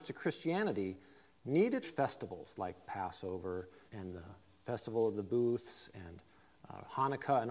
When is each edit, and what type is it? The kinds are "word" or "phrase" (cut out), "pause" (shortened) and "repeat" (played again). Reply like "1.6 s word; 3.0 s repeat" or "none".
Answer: 1.8 s phrase; 3.9 s word; 4.4 s pause